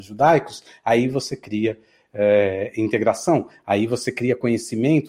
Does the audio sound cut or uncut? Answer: uncut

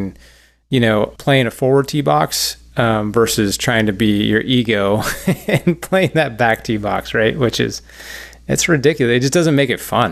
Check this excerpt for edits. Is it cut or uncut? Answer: cut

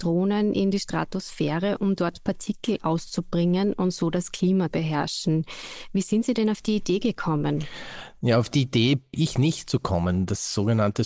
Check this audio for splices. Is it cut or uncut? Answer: cut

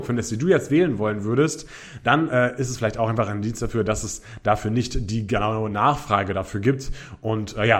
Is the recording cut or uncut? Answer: uncut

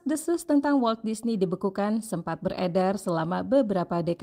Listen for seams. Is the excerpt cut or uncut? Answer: uncut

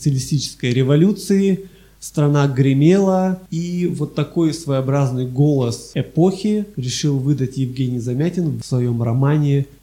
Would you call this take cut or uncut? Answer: uncut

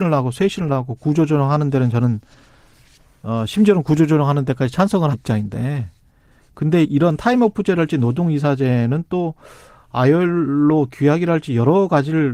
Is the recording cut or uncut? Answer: cut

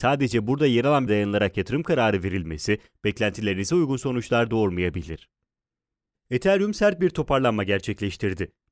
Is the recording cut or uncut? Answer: cut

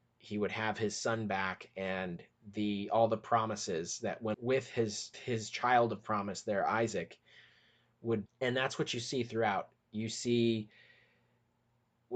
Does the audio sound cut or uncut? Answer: cut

